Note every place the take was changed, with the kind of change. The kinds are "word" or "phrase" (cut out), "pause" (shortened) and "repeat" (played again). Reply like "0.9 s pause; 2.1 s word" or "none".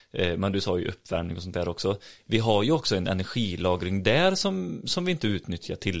none